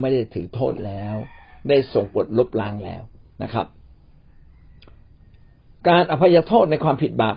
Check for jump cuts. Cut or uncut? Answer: uncut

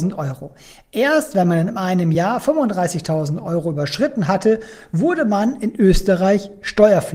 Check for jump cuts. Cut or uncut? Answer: uncut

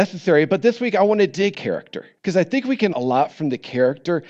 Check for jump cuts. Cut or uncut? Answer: cut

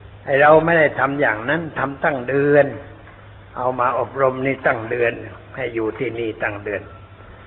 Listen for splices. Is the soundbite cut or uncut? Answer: cut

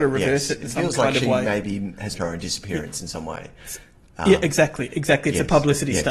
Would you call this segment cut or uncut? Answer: cut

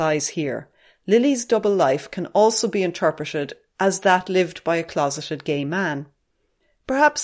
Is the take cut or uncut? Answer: uncut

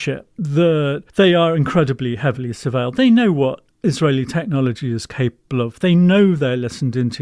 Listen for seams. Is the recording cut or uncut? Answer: cut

